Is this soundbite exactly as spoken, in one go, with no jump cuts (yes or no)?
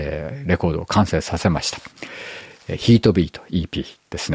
yes